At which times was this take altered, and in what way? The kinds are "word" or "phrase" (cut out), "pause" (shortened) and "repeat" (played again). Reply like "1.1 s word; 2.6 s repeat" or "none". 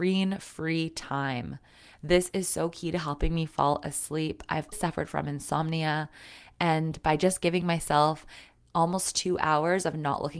4.7 s word

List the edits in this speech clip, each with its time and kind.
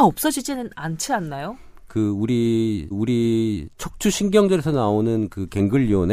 2.9 s repeat

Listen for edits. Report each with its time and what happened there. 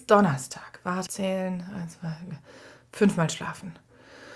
1.1 s phrase

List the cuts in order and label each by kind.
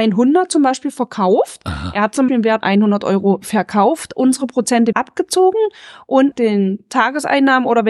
2.3 s word; 2.6 s word; 4.9 s word; 6.3 s word

